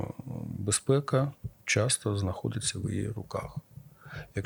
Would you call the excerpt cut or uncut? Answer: uncut